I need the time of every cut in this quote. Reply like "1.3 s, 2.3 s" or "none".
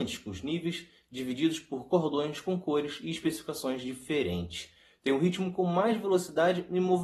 none